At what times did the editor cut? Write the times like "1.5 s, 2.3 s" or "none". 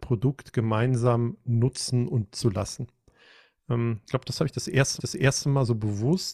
2.3 s, 4.1 s, 5.0 s